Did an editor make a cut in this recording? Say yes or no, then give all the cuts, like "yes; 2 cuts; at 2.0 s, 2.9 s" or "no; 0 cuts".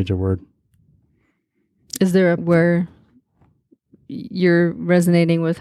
yes; 1 cut; at 2.4 s